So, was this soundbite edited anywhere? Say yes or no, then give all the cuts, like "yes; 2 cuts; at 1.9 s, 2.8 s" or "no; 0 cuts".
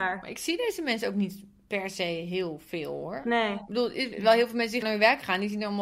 yes; 1 cut; at 4.8 s